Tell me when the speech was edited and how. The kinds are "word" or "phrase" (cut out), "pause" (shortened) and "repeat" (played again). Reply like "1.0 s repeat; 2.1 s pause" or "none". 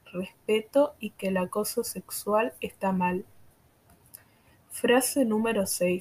none